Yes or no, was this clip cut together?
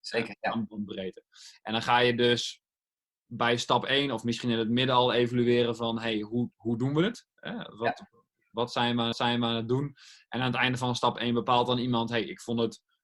yes